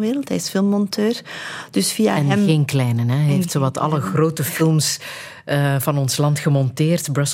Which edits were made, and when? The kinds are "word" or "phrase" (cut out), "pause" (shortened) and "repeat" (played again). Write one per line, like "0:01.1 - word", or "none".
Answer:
none